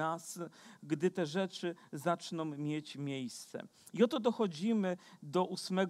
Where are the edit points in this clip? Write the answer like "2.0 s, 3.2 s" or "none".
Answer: none